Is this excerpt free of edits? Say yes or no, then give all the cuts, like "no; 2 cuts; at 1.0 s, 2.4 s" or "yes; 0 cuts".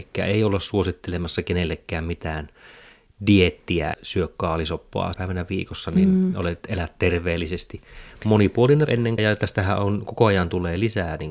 no; 4 cuts; at 3.9 s, 5.1 s, 8.9 s, 9.2 s